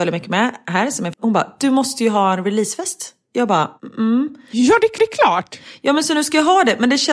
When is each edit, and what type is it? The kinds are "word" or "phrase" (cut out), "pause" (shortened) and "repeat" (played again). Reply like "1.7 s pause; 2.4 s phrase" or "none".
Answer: 1.1 s word; 5.0 s repeat